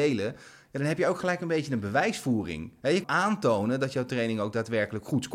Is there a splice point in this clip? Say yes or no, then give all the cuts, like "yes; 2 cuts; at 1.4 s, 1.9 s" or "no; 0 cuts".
yes; 1 cut; at 3.0 s